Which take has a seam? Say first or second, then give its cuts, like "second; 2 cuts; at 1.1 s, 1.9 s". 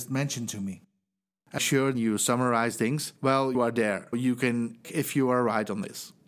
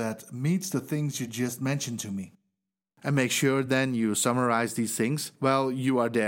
first; 6 cuts; at 1.6 s, 1.9 s, 2.8 s, 3.5 s, 4.1 s, 4.8 s